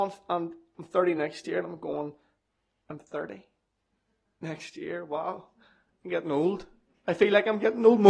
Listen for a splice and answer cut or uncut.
uncut